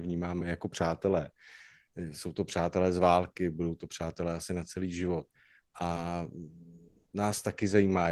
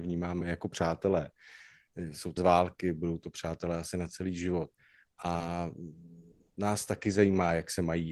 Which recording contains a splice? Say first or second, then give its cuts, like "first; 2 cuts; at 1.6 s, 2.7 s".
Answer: second; 1 cut; at 2.4 s